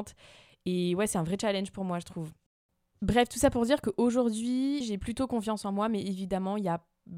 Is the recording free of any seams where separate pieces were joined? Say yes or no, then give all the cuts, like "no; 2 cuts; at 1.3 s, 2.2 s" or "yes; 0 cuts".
yes; 0 cuts